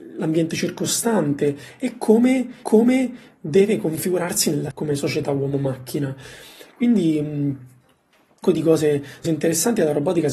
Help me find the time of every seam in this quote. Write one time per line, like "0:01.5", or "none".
0:02.6
0:04.7
0:08.4
0:09.2